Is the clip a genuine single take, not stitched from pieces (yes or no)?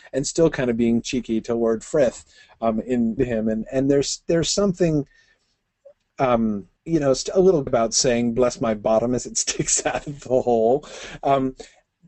no